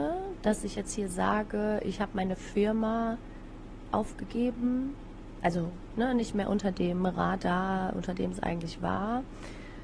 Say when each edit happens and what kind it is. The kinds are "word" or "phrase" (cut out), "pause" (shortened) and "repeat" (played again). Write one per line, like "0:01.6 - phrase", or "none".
none